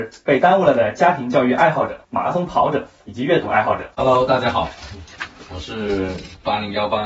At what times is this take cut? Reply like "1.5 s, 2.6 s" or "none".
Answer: 2.0 s, 3.9 s